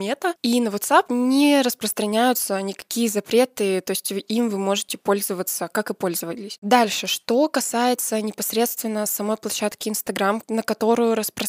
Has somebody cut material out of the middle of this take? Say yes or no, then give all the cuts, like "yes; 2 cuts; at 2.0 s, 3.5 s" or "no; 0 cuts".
no; 0 cuts